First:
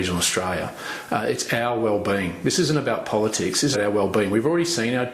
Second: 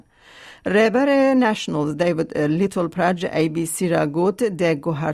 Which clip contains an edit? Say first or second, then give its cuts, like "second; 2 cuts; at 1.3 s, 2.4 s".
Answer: first; 1 cut; at 3.7 s